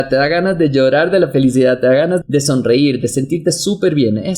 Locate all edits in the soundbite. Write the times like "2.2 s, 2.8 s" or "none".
2.2 s